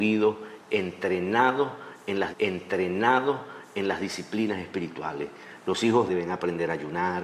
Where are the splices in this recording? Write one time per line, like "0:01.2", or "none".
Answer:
0:02.3
0:06.1